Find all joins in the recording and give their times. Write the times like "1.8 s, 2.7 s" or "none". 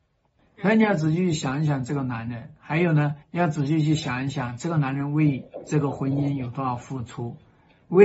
3.2 s